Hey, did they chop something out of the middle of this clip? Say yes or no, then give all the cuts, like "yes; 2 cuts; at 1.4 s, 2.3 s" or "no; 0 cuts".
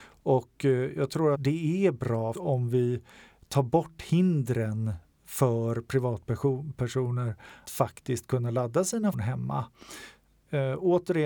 yes; 4 cuts; at 1.3 s, 2.3 s, 7.6 s, 9.1 s